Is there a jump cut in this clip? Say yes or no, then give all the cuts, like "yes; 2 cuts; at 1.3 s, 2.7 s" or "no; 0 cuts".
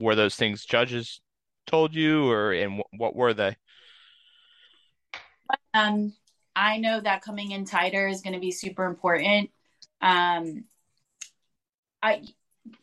yes; 1 cut; at 5.7 s